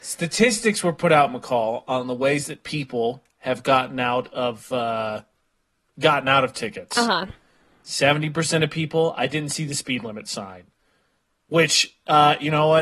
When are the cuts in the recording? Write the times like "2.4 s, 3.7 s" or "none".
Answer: none